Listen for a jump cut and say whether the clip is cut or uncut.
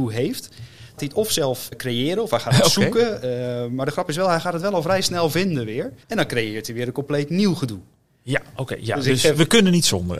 cut